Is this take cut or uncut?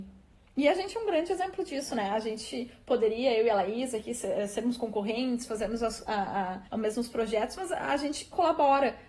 cut